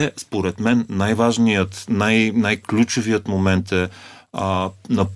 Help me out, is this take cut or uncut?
uncut